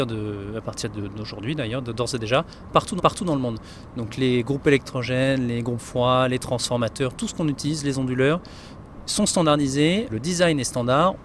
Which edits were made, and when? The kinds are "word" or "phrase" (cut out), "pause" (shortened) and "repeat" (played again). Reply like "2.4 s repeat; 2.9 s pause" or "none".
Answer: 3.0 s repeat; 10.1 s word